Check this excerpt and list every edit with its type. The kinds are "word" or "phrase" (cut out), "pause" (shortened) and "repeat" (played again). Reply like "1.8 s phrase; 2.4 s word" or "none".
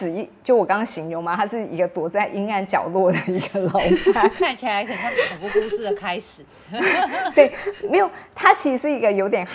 none